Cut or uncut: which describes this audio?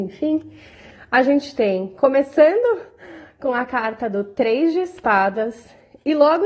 uncut